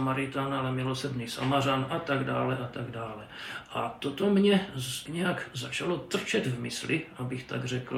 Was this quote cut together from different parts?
yes; 1 cut; at 5.1 s

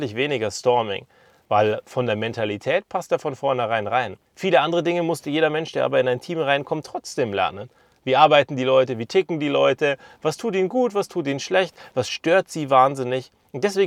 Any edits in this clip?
yes; 1 cut; at 4.3 s

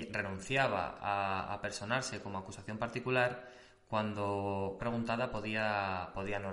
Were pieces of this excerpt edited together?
yes; 1 cut; at 4.8 s

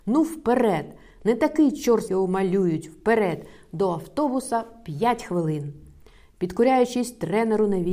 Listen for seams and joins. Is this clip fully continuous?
no; 1 cut; at 2.1 s

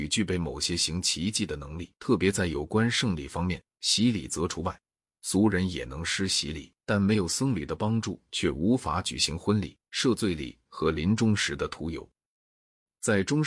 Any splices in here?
yes; 3 cuts; at 2.0 s, 6.8 s, 9.8 s

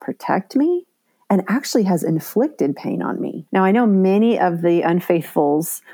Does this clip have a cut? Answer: yes; 1 cut; at 3.5 s

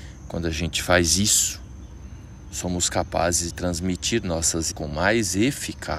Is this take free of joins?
no; 2 cuts; at 3.5 s, 4.7 s

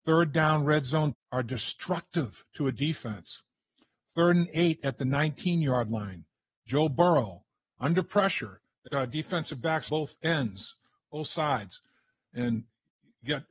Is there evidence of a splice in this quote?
yes; 3 cuts; at 1.1 s, 8.9 s, 9.9 s

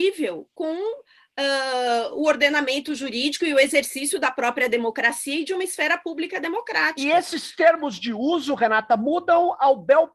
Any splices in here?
no; 0 cuts

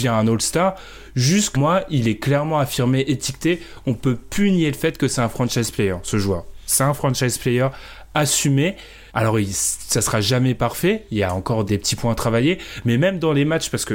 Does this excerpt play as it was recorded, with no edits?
no; 3 cuts; at 1.5 s, 9.1 s, 11.7 s

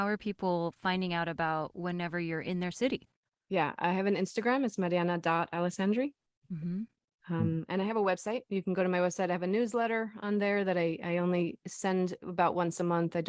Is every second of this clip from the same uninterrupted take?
yes; 0 cuts

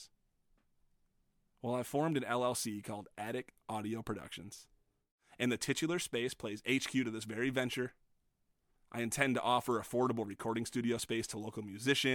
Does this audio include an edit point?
no; 0 cuts

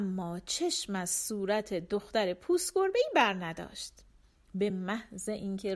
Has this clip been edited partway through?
no; 0 cuts

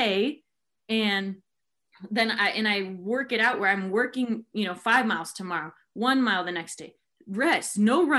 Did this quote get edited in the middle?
no; 0 cuts

